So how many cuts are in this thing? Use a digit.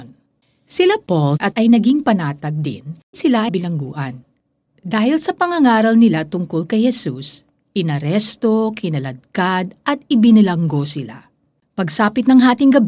3